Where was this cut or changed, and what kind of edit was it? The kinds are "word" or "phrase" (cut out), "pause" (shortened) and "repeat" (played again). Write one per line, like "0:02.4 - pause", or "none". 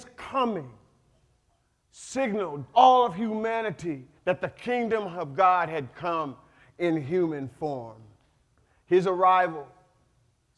0:02.7 - word
0:04.2 - pause